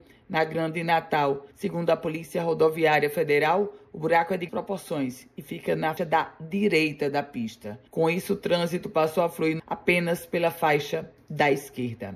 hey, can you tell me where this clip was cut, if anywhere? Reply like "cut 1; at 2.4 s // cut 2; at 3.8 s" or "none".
cut 1; at 1.5 s // cut 2; at 4.5 s // cut 3; at 6.0 s // cut 4; at 7.9 s // cut 5; at 9.6 s